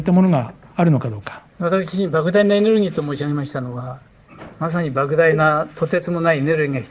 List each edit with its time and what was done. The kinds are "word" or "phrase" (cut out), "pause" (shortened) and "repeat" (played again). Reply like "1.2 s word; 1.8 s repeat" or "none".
1.5 s pause